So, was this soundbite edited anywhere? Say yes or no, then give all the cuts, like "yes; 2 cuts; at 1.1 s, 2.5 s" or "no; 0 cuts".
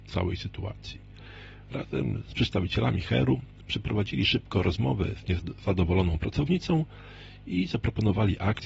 no; 0 cuts